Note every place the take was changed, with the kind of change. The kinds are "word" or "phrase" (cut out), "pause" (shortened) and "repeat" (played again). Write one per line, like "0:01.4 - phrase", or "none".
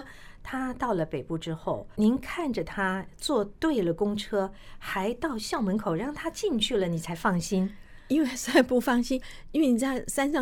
0:01.9 - word